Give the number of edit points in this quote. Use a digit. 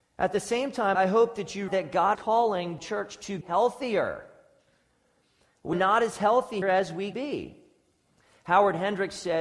8